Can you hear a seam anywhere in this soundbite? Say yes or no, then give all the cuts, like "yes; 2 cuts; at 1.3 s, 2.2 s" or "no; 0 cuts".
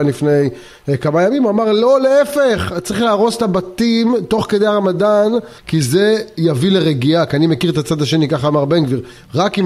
yes; 1 cut; at 5.6 s